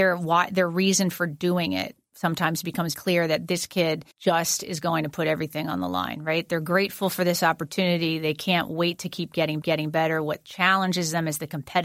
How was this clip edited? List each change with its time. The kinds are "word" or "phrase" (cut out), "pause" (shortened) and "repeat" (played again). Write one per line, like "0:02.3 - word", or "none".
0:02.9 - word
0:04.1 - pause
0:09.6 - repeat